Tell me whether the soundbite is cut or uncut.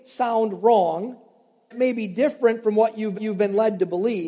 cut